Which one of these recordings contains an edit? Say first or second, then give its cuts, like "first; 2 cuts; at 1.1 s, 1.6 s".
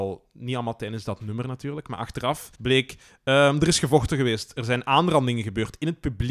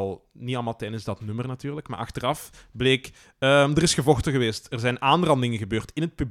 first; 1 cut; at 2.5 s